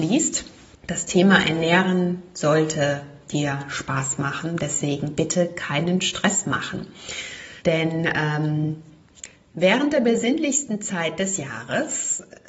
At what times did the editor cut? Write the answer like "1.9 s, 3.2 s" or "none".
7.6 s, 9.3 s